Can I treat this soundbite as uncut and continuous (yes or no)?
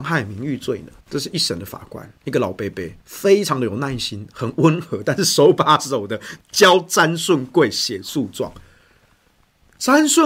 no